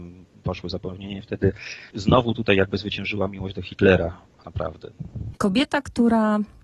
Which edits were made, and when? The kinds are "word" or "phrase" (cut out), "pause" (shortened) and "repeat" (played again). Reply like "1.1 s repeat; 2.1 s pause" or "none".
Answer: 1.9 s word; 4.4 s phrase